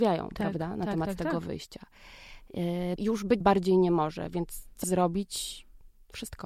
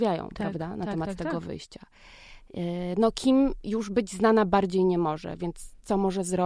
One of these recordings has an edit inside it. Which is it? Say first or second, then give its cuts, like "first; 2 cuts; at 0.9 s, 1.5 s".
first; 3 cuts; at 3.0 s, 3.4 s, 4.8 s